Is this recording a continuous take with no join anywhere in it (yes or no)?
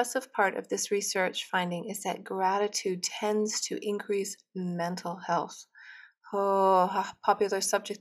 yes